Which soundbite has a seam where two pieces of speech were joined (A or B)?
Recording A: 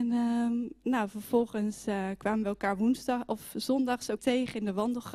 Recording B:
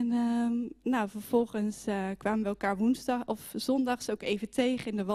A